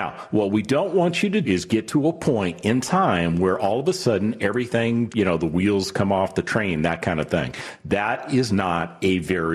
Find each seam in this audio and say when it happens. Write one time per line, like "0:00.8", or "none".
0:01.4
0:05.1